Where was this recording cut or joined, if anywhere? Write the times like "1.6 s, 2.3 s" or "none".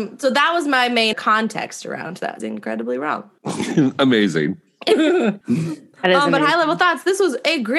1.1 s, 2.4 s, 3.4 s, 5.4 s